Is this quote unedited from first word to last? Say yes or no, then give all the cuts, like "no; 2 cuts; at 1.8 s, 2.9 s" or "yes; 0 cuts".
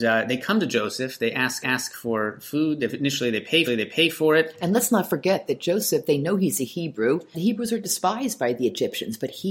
no; 3 cuts; at 1.6 s, 3.7 s, 7.3 s